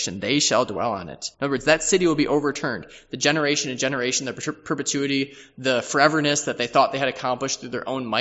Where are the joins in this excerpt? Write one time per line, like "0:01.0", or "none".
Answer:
0:01.3